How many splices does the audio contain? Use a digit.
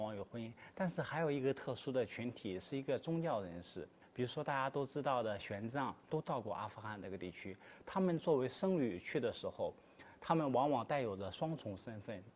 1